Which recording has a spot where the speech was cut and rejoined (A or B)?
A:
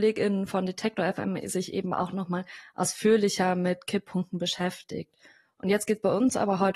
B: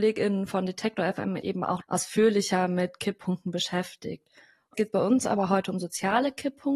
B